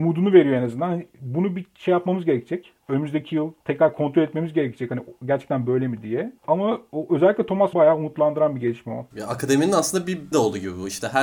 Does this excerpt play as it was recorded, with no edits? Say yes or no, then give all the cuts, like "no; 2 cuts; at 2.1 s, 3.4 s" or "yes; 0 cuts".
no; 5 cuts; at 3.6 s, 6.4 s, 7.7 s, 9.1 s, 10.3 s